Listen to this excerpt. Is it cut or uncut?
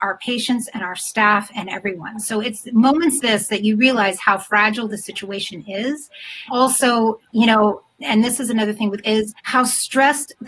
cut